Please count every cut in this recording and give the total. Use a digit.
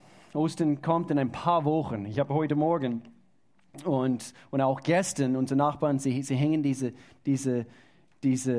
0